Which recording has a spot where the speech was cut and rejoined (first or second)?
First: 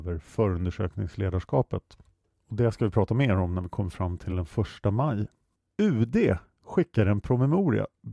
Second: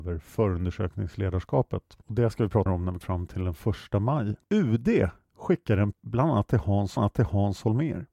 second